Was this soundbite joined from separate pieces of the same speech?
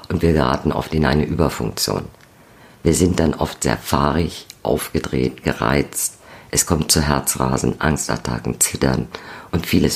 no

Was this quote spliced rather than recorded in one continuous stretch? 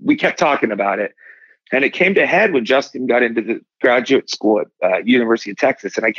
no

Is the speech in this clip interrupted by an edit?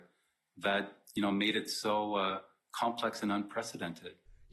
no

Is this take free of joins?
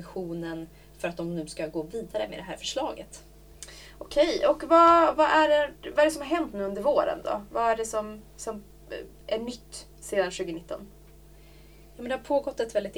yes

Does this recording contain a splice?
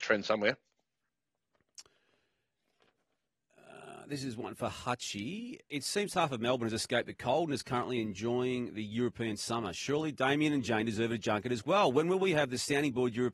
yes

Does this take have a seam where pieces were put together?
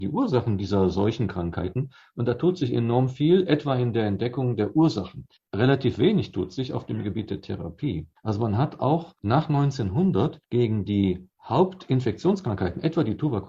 no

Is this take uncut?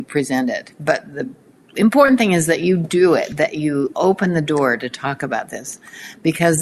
yes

